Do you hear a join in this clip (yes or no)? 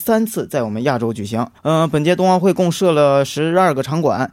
yes